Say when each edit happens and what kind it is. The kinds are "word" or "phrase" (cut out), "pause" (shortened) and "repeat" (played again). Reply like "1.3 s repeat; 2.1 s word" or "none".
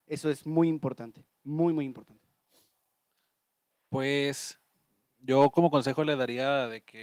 none

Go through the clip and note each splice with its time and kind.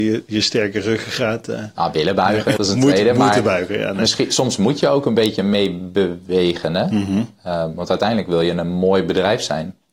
2.6 s word

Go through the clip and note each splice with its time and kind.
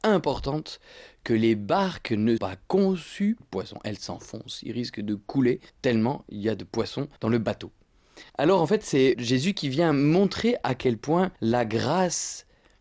2.4 s word; 3.4 s phrase; 5.7 s pause; 7.2 s pause; 8.3 s pause; 9.1 s word; 11.4 s pause

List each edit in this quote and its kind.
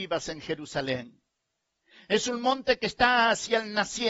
none

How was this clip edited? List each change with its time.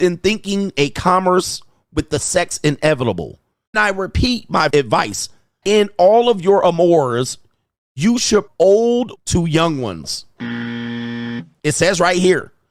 3.7 s word; 4.7 s word; 5.6 s word; 8.5 s word; 9.2 s word

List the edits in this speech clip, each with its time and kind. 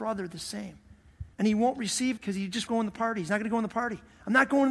1.3 s pause; 2.2 s word; 2.7 s word

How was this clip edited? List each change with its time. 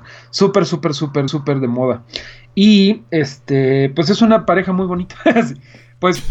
1.3 s repeat

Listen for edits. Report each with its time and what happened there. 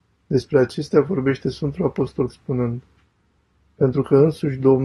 2.3 s word

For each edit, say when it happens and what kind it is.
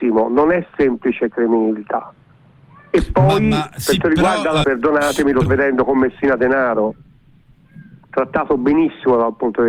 2.3 s pause; 4.0 s word; 4.6 s word; 5.5 s phrase

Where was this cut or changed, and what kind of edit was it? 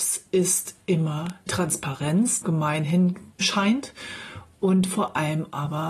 1.5 s word; 2.4 s word; 3.4 s word

